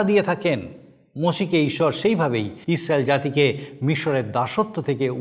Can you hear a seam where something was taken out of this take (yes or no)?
yes